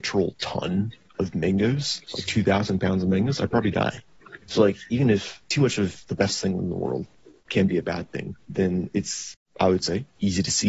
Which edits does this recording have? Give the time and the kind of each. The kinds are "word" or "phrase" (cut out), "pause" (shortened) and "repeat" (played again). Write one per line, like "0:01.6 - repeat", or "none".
0:02.0 - pause
0:04.4 - pause
0:08.4 - pause